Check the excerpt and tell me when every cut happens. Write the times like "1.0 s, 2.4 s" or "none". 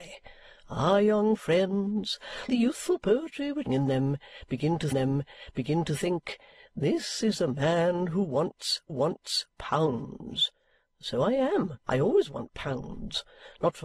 2.5 s, 3.7 s, 4.9 s, 8.9 s, 11.8 s